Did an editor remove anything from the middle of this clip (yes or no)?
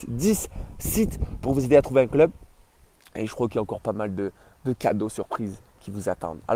no